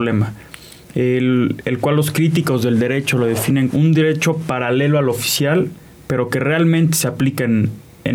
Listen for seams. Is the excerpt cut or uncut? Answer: cut